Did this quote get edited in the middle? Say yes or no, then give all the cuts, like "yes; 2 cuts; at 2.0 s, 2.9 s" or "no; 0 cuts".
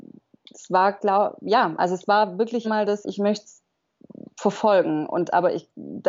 yes; 2 cuts; at 2.6 s, 3.0 s